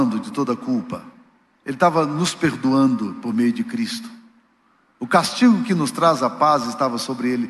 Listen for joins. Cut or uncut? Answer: uncut